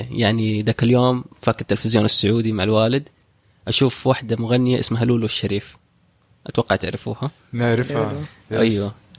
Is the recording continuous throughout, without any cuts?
yes; 0 cuts

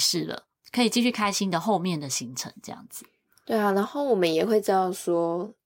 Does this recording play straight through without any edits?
yes; 0 cuts

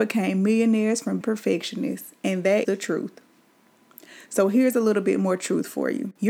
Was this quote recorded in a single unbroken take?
no; 2 cuts; at 1.2 s, 2.6 s

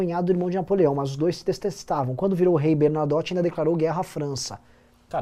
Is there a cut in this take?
no; 0 cuts

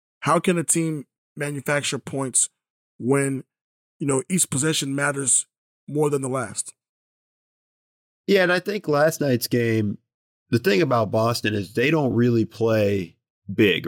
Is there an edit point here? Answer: no; 0 cuts

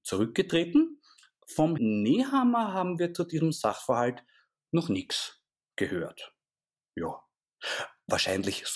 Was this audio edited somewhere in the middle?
yes; 1 cut; at 1.8 s

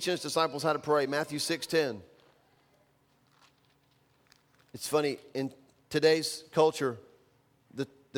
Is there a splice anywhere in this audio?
no; 0 cuts

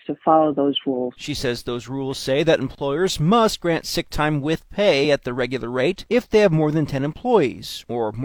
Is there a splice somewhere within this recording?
no; 0 cuts

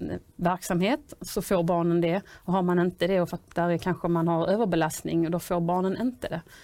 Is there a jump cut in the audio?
no; 0 cuts

